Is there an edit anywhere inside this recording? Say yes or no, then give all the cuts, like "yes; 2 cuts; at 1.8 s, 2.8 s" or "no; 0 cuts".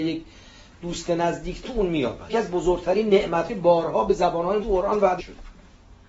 yes; 5 cuts; at 1.6 s, 2.3 s, 3.5 s, 4.6 s, 5.2 s